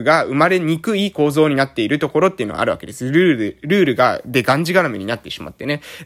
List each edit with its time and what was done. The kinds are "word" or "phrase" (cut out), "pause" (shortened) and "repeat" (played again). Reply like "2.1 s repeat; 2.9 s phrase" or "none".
none